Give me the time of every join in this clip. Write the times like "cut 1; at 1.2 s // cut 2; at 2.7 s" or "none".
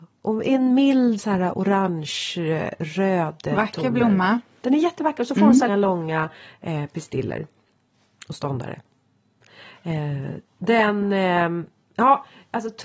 cut 1; at 1.2 s // cut 2; at 5.7 s